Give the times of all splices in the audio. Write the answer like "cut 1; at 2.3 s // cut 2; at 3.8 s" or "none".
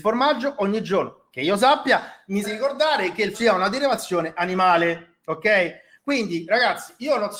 cut 1; at 2.4 s // cut 2; at 3.3 s

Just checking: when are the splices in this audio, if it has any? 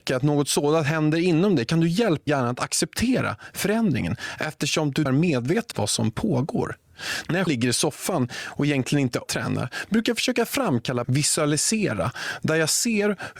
cut 1; at 2.3 s // cut 2; at 5.1 s // cut 3; at 5.7 s // cut 4; at 7.5 s // cut 5; at 9.3 s // cut 6; at 11.0 s

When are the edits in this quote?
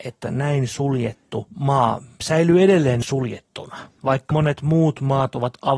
cut 1; at 1.5 s // cut 2; at 3.0 s // cut 3; at 4.3 s

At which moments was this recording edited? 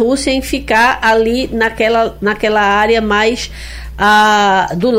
none

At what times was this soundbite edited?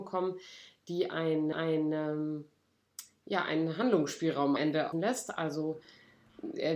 cut 1; at 1.5 s // cut 2; at 4.6 s // cut 3; at 4.9 s

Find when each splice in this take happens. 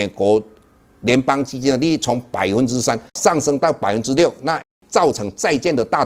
cut 1; at 3.1 s

